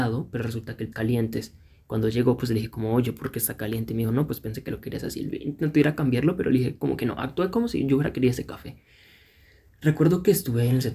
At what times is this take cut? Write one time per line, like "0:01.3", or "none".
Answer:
0:00.9